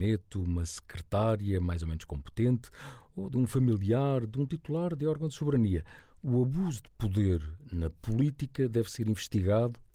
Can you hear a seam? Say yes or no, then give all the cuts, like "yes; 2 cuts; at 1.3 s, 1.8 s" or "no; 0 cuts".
no; 0 cuts